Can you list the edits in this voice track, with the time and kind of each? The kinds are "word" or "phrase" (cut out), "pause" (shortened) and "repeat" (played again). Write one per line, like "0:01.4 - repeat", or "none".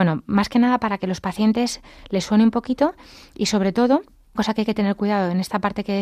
0:04.4 - word